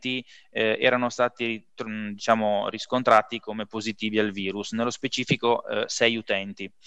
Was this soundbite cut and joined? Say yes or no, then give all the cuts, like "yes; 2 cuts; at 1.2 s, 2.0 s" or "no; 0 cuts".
no; 0 cuts